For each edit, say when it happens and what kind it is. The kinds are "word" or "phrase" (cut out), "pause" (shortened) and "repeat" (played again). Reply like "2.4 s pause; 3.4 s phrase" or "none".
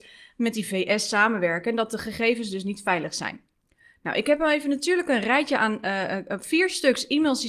none